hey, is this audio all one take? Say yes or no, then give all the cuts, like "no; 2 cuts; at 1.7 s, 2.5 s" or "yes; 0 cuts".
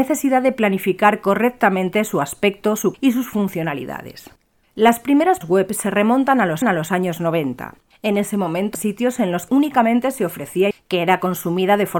no; 8 cuts; at 2.9 s, 4.6 s, 5.4 s, 6.6 s, 7.9 s, 8.7 s, 9.5 s, 10.7 s